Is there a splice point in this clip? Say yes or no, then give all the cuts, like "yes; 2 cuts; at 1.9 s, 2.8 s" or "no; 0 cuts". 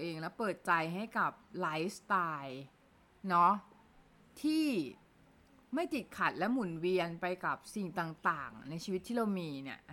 no; 0 cuts